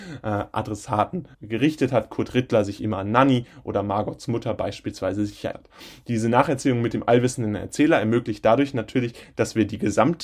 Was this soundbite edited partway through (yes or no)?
yes